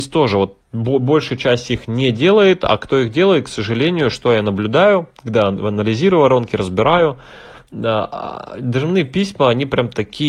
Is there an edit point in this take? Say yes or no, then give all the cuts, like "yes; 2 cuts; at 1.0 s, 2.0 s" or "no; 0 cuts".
no; 0 cuts